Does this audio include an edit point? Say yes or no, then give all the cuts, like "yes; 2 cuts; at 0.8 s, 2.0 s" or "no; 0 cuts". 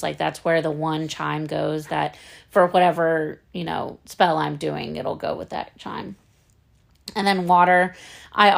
no; 0 cuts